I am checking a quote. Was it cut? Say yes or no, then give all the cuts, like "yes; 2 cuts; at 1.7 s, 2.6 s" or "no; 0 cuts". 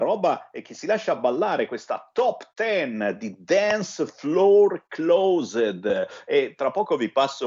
no; 0 cuts